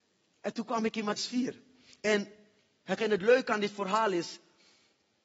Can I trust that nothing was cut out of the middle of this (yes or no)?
no